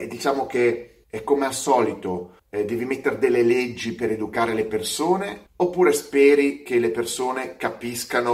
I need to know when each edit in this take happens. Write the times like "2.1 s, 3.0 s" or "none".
1.0 s, 2.4 s, 5.5 s